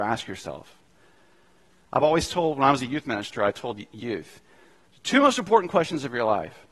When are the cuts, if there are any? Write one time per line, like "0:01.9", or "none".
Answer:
none